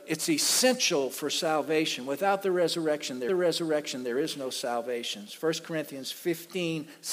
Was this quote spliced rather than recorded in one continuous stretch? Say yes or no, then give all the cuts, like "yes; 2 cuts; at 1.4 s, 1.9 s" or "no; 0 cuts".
yes; 1 cut; at 3.3 s